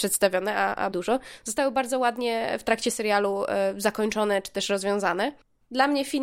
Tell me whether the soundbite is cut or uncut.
cut